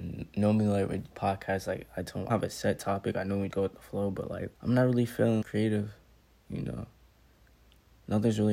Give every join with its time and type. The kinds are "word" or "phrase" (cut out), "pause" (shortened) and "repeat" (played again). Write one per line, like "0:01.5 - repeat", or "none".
0:01.1 - phrase
0:02.3 - phrase
0:03.5 - word
0:04.5 - pause
0:05.4 - word

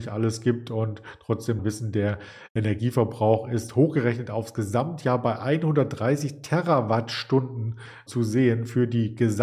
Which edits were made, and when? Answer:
0:01.6 - phrase
0:08.1 - word

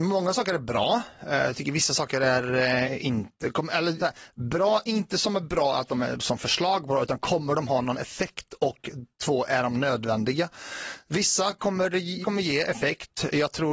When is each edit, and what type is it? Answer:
0:04.0 - word
0:12.2 - word

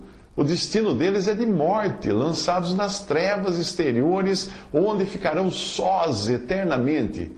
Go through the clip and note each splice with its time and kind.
none

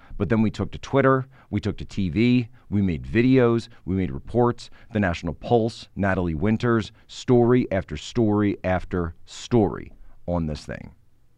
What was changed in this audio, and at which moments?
none

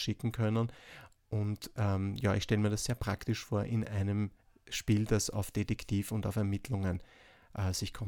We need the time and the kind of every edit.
none

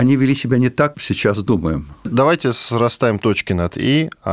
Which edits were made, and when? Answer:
0:00.9 - phrase

